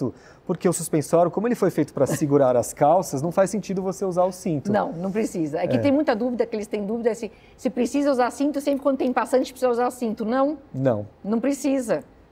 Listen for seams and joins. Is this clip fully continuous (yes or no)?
yes